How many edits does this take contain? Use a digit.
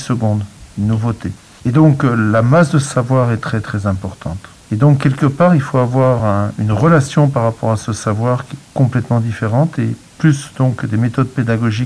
0